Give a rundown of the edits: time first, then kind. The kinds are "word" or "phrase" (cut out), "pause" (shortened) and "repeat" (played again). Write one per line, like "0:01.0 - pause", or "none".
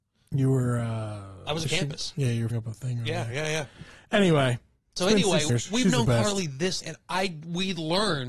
0:01.7 - word
0:02.5 - word
0:05.5 - word
0:06.8 - word

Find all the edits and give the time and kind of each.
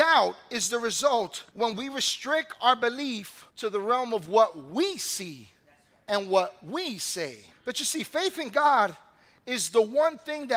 0:01.5 - pause
0:03.5 - pause
0:07.5 - pause

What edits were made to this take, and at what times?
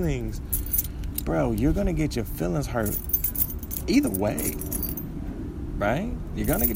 none

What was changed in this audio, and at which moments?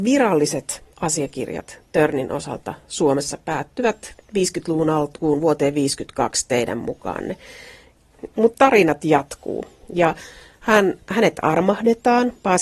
0:00.9 - pause

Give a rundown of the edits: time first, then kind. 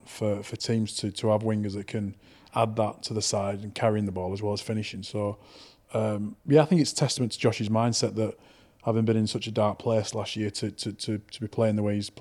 0:06.4 - pause

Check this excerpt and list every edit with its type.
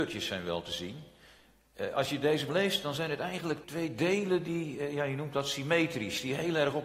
0:02.5 - word
0:03.6 - word

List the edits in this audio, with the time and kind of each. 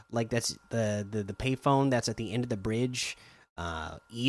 none

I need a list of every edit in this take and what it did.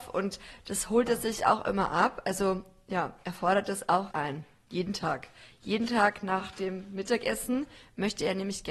0:04.1 - word

